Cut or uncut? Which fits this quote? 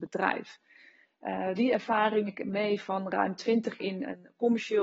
cut